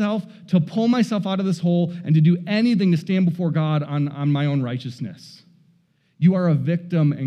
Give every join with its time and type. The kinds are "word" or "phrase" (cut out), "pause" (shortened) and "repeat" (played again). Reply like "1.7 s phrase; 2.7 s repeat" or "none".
none